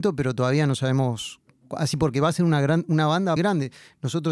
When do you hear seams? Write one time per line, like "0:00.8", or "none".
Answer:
0:03.4

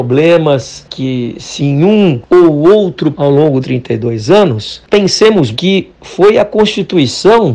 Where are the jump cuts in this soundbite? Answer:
0:01.6
0:03.1
0:03.6
0:05.5

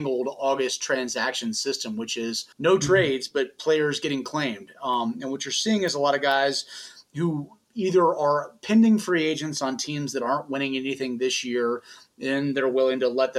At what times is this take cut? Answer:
0:02.5

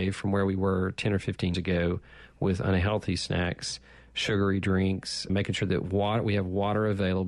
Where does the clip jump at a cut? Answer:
0:01.5
0:05.3

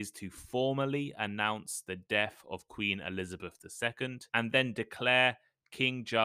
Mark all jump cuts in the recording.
0:04.3

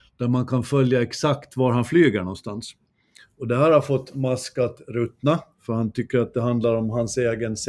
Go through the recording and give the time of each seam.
none

